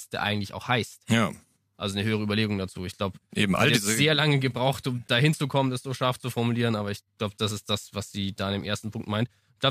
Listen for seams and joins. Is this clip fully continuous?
no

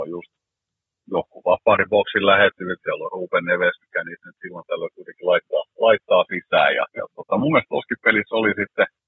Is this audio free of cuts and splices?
no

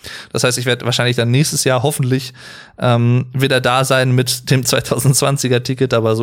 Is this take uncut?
yes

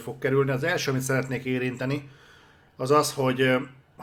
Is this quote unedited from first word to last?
yes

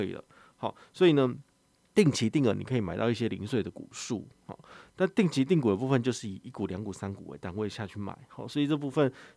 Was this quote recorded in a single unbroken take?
yes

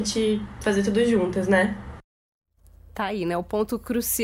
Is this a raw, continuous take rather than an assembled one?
yes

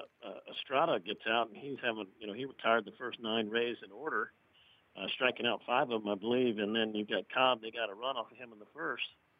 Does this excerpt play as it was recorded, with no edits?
yes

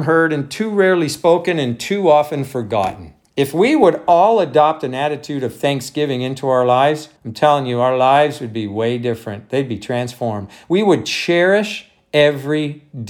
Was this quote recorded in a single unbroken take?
no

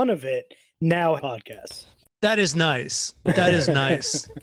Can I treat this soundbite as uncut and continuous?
no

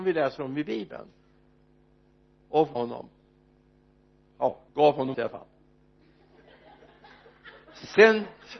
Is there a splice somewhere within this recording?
yes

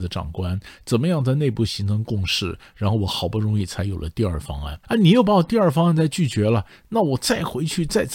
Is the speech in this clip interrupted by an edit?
yes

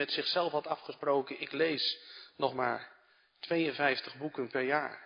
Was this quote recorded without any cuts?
yes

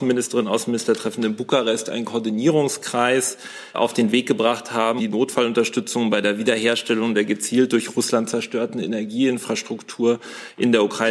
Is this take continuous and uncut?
no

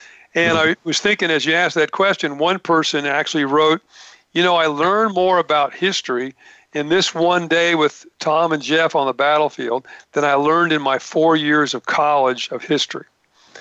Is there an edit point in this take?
no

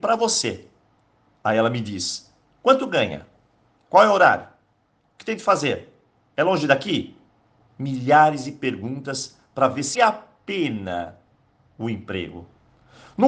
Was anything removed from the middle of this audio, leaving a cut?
yes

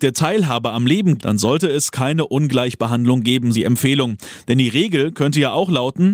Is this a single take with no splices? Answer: no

